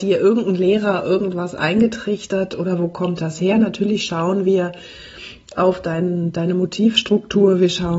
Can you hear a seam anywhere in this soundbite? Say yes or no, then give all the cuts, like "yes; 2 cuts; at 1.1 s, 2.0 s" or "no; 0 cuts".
no; 0 cuts